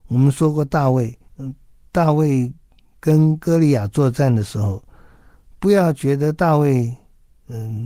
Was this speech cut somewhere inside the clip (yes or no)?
yes